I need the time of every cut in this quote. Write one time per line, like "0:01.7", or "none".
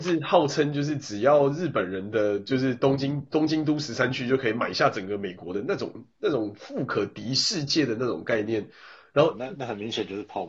none